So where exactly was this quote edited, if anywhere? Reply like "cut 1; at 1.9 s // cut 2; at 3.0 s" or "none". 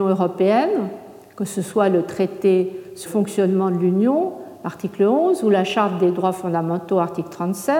cut 1; at 3.1 s